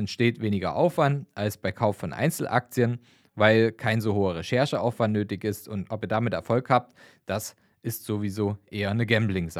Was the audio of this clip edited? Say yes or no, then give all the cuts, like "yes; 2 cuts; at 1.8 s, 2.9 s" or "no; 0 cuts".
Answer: no; 0 cuts